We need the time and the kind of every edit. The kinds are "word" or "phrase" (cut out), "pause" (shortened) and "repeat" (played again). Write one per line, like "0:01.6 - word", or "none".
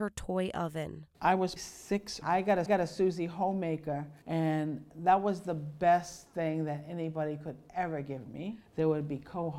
0:01.1 - pause
0:01.6 - word
0:02.2 - phrase
0:02.7 - repeat
0:04.2 - pause